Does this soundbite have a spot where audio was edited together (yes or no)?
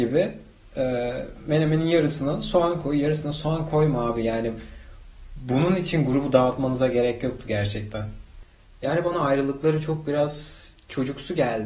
no